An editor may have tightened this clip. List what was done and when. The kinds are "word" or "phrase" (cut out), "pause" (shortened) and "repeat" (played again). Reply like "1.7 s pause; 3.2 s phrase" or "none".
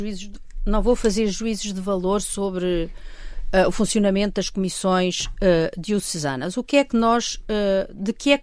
none